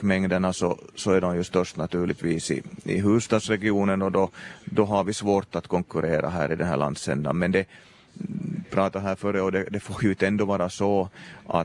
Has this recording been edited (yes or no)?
no